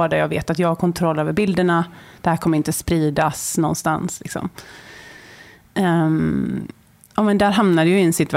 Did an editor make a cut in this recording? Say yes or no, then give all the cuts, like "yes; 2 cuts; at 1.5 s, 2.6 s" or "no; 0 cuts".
no; 0 cuts